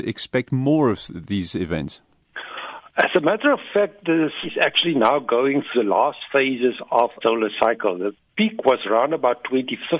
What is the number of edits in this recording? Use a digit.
3